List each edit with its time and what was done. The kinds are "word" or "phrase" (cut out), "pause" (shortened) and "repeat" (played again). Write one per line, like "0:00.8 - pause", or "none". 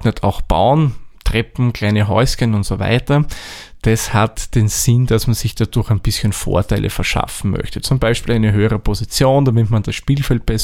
none

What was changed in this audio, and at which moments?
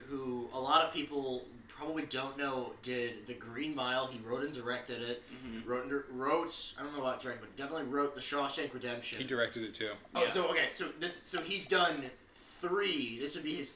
none

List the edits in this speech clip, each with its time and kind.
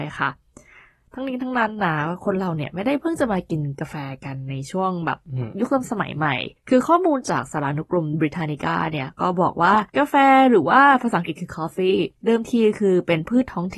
0:06.6 - pause
0:09.9 - pause
0:12.2 - pause

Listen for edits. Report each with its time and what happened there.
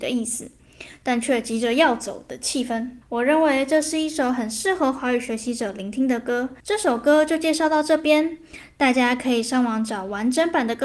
0:03.0 - pause
0:06.6 - pause

